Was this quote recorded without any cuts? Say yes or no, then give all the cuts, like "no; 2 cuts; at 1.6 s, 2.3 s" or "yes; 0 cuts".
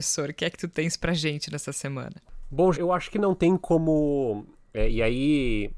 no; 1 cut; at 2.7 s